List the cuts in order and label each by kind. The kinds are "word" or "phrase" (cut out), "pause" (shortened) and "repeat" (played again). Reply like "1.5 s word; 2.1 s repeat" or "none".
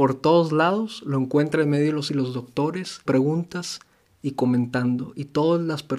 2.1 s word; 3.1 s word